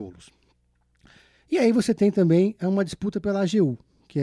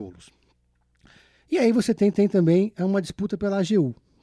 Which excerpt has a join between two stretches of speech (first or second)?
second